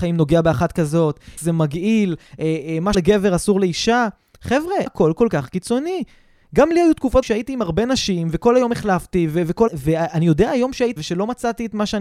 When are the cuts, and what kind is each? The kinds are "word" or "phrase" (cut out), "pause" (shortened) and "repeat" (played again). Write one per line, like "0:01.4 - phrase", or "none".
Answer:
0:01.4 - word
0:02.9 - word
0:04.9 - word
0:07.2 - word
0:09.7 - word
0:11.0 - word